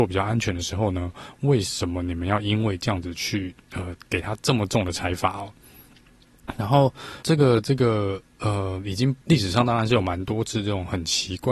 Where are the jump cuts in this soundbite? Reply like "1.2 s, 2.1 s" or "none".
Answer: 3.6 s, 7.2 s, 9.2 s